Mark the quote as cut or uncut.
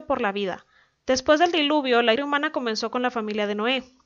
cut